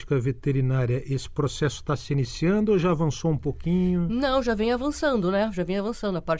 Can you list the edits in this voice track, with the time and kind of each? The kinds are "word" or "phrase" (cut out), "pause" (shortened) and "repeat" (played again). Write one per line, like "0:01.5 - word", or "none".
none